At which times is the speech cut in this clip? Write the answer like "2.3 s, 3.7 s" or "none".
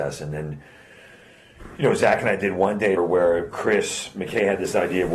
3.0 s